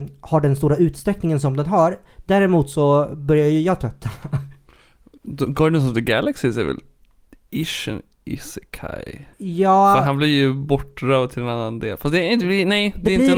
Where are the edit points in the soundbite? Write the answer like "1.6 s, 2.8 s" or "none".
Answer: 9.3 s